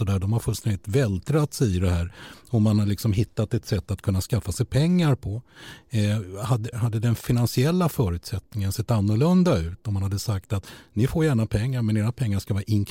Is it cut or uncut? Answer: cut